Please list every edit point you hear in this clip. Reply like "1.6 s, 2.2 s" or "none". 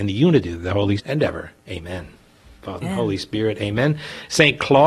1.0 s, 1.6 s, 2.8 s